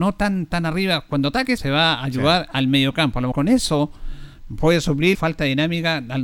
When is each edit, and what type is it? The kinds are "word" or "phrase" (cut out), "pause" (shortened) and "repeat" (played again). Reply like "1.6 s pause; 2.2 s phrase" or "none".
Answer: 1.6 s phrase; 3.3 s word; 5.1 s word